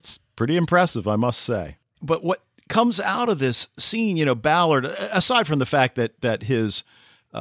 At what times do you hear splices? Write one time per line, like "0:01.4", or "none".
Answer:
none

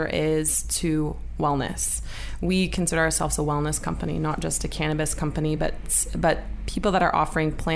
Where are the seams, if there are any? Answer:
none

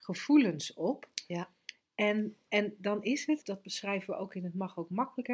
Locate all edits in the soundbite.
0:03.4

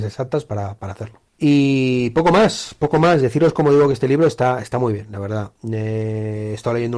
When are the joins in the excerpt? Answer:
0:01.3

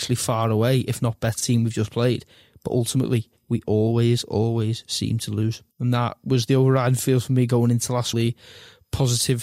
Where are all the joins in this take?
0:01.4
0:03.4
0:05.7
0:08.1

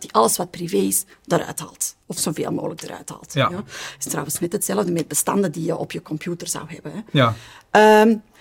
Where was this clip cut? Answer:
0:02.0

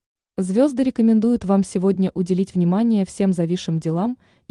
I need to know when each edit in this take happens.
none

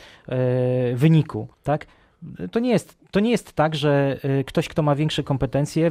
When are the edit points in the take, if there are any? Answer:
0:01.5

